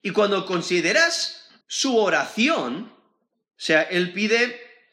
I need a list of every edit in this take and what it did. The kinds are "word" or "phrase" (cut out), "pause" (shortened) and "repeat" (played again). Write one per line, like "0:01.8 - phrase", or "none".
0:01.6 - pause
0:03.6 - word